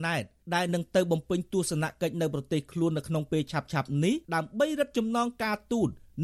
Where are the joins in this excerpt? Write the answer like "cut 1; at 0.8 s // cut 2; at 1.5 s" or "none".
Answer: cut 1; at 4.2 s

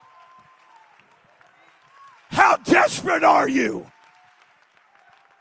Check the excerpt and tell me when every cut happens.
none

